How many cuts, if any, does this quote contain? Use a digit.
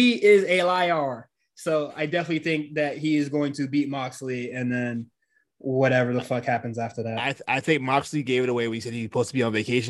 0